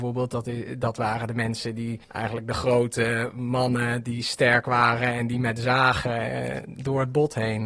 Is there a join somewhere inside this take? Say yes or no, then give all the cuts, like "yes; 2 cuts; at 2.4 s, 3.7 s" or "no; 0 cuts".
yes; 1 cut; at 2.0 s